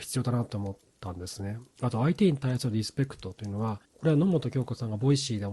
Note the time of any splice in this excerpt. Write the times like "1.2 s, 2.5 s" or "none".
1.7 s, 3.8 s